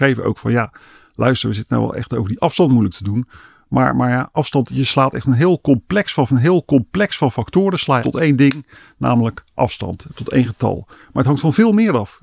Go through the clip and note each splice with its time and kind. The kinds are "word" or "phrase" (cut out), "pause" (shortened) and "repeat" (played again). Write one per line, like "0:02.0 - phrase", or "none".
0:04.7 - word
0:06.3 - repeat
0:08.0 - phrase